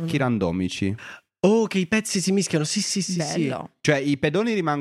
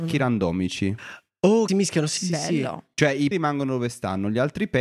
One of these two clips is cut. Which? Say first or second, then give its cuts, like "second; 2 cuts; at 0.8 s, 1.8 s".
second; 3 cuts; at 1.7 s, 2.2 s, 3.3 s